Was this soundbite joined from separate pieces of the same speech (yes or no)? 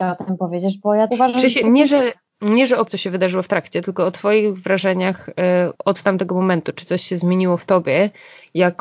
yes